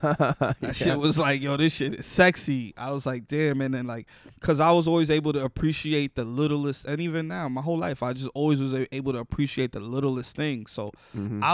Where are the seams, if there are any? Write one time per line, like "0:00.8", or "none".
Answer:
0:04.4